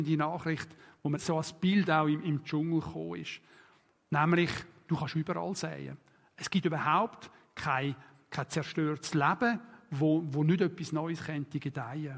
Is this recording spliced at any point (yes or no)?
yes